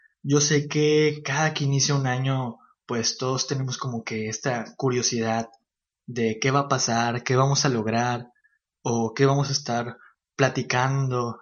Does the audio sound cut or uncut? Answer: uncut